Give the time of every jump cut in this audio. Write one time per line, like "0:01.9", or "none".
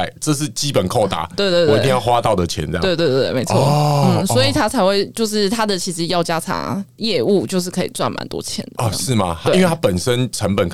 none